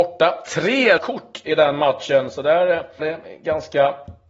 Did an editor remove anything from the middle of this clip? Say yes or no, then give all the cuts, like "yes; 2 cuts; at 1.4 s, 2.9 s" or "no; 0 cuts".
yes; 2 cuts; at 1.0 s, 3.0 s